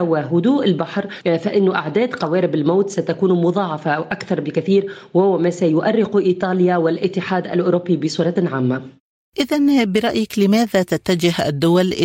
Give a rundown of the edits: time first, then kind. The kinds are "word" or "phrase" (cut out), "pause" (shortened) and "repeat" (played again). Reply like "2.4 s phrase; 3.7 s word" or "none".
none